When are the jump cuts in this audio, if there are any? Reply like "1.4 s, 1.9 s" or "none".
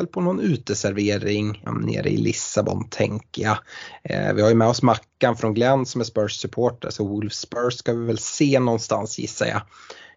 1.7 s